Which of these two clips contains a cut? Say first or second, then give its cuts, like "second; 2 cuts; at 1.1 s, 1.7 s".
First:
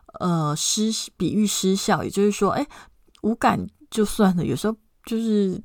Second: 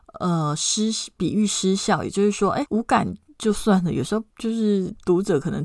second; 2 cuts; at 2.7 s, 4.3 s